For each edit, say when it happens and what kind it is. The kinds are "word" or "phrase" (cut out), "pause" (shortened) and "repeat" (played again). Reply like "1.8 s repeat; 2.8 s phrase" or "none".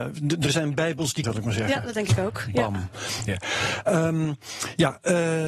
1.2 s phrase; 3.3 s word